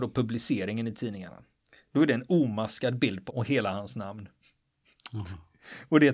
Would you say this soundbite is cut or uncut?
cut